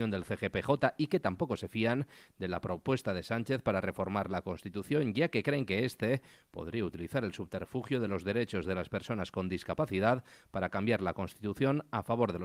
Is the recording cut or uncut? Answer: uncut